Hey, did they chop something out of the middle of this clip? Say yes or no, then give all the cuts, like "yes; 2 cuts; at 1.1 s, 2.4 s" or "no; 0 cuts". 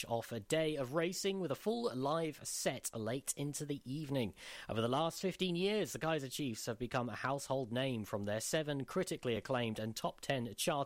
no; 0 cuts